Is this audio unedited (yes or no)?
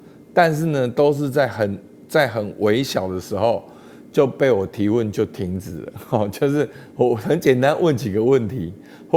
yes